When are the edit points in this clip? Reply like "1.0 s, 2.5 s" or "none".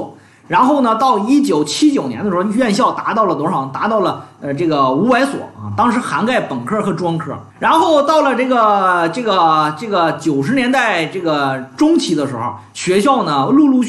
7.5 s